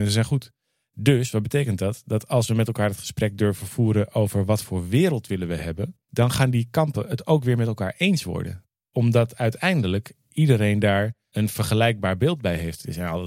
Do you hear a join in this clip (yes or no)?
yes